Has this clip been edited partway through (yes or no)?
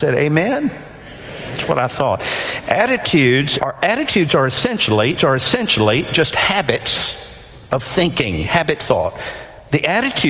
yes